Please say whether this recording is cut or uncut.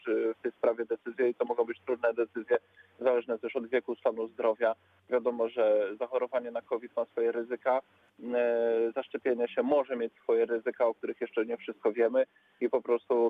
uncut